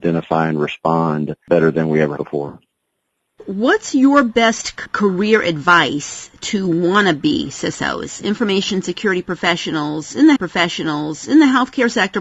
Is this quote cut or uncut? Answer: cut